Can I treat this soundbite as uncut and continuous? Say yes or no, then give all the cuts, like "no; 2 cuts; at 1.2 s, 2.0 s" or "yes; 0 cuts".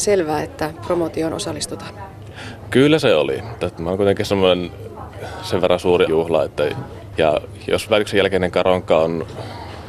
no; 2 cuts; at 6.1 s, 7.9 s